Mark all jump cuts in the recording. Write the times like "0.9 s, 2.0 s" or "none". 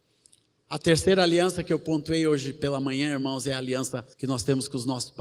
4.1 s